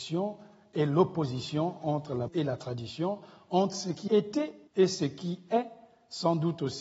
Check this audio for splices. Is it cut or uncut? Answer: cut